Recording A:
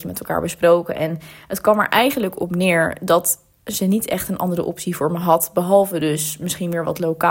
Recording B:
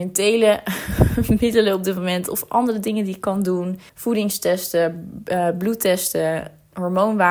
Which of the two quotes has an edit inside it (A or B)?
B